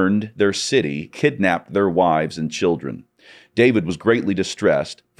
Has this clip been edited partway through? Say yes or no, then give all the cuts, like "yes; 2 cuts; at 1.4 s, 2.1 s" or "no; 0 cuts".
yes; 1 cut; at 1.1 s